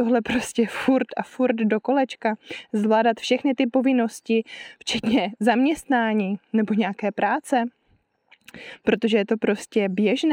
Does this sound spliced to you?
no; 0 cuts

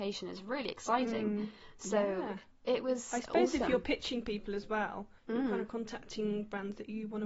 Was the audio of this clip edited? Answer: yes; 2 cuts; at 2.5 s, 5.2 s

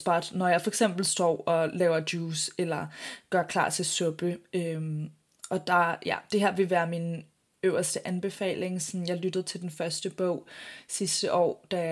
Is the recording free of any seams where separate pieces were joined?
yes; 0 cuts

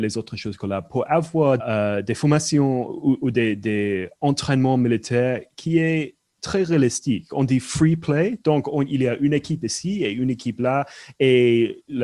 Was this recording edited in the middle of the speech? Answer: yes; 1 cut; at 1.6 s

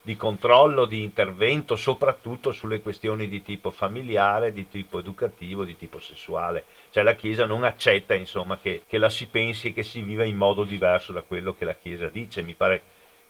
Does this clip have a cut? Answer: yes; 1 cut; at 8.8 s

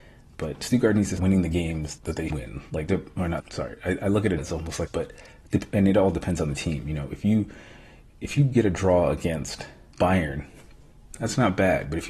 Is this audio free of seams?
no; 8 cuts; at 1.2 s, 2.0 s, 2.3 s, 2.9 s, 3.4 s, 4.4 s, 4.9 s, 9.9 s

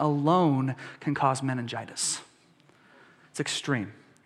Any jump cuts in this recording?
no; 0 cuts

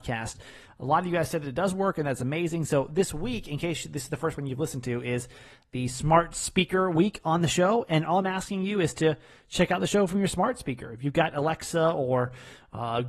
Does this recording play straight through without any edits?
yes; 0 cuts

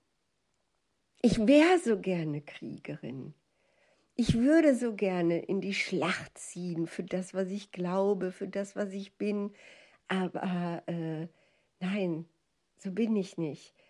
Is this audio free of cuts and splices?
yes; 0 cuts

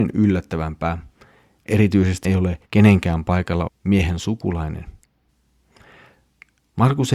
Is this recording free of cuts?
no; 3 cuts; at 2.2 s, 2.6 s, 3.7 s

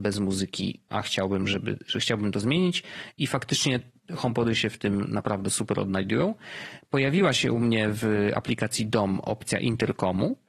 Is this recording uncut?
no; 1 cut; at 0.9 s

